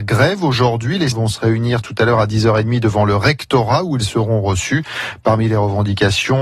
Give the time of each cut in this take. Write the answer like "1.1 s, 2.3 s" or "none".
1.1 s